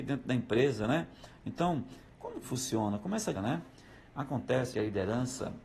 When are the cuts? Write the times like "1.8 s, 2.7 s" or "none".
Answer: 2.4 s, 3.3 s, 4.7 s

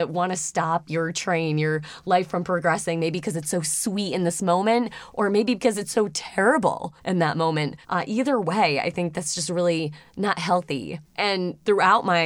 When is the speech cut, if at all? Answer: 7.0 s, 7.8 s, 11.0 s

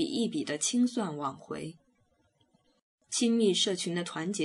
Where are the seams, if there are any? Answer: none

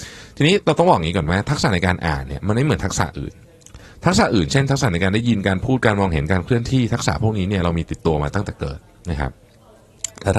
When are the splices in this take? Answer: none

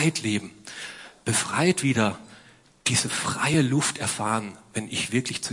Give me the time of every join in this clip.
none

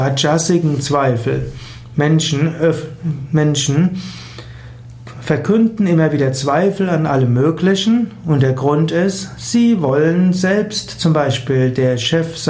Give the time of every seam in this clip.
none

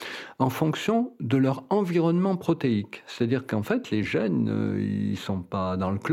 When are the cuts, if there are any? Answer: none

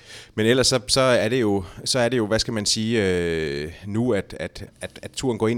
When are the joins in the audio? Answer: 4.7 s

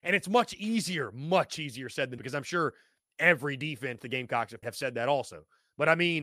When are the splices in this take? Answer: 2.2 s, 4.6 s

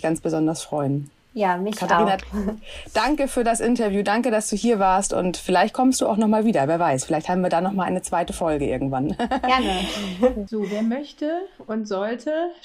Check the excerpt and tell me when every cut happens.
none

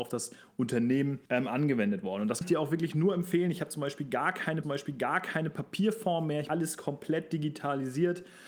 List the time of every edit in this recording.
1.3 s, 2.4 s, 4.6 s, 6.5 s

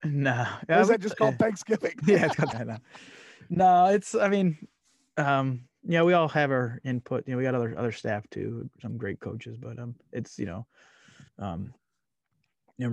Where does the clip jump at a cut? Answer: 2.5 s, 11.3 s

